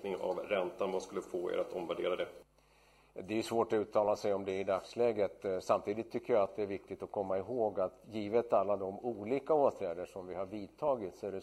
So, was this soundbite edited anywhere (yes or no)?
no